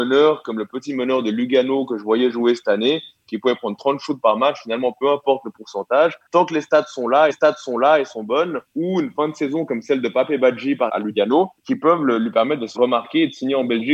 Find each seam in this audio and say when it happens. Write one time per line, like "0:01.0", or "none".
0:06.3
0:07.3
0:08.6
0:10.9
0:11.6
0:12.7